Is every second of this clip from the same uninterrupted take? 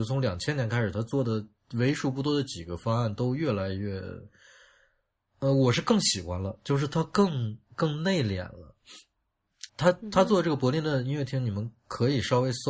no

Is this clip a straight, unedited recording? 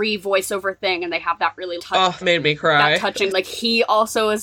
no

